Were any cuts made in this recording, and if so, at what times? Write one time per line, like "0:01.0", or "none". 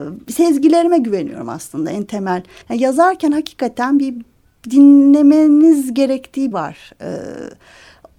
0:02.6
0:06.5